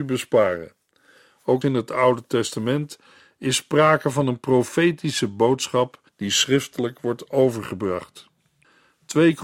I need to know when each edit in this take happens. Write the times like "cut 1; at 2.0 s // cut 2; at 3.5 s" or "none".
cut 1; at 1.6 s // cut 2; at 6.1 s